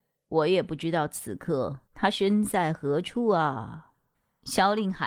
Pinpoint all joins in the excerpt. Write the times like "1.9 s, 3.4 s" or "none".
1.8 s